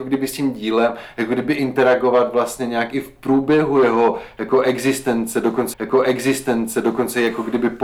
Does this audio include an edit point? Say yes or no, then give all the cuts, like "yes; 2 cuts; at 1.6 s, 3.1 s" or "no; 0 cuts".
yes; 1 cut; at 5.7 s